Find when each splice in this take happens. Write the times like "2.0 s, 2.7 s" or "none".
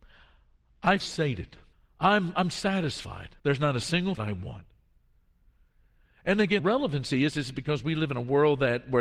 1.0 s, 1.7 s, 3.4 s, 4.2 s, 6.6 s